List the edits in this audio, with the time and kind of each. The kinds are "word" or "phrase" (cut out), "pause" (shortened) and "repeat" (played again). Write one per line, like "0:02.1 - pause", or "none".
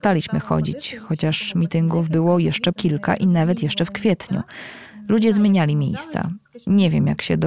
0:02.7 - word